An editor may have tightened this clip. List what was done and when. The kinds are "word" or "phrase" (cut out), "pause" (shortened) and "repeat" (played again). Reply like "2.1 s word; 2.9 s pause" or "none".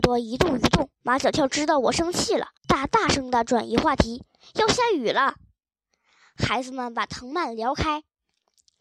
0.9 s pause; 2.6 s pause